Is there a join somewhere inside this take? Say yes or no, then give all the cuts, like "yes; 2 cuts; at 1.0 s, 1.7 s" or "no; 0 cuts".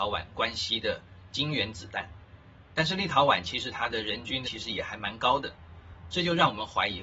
yes; 1 cut; at 4.4 s